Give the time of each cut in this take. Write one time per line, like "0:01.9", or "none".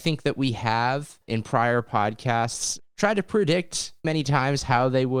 0:01.3
0:04.0

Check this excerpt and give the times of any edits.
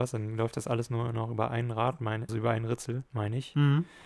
0:02.3
0:03.1

